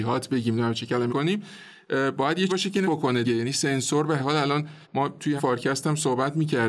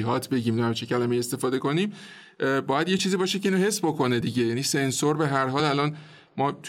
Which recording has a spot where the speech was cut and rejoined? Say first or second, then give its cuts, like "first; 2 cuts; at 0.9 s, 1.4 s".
first; 7 cuts; at 1.1 s, 2.5 s, 2.8 s, 3.2 s, 4.2 s, 4.8 s, 5.4 s